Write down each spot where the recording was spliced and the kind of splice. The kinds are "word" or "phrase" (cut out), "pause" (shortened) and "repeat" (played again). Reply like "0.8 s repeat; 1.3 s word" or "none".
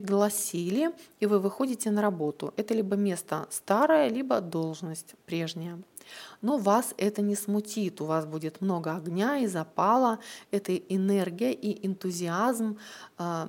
none

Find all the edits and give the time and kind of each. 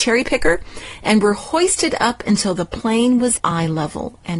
3.4 s word

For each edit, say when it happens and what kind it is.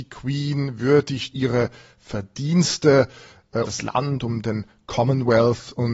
1.3 s phrase; 3.7 s word

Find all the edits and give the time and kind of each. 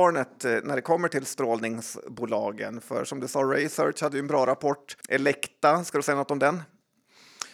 5.0 s pause

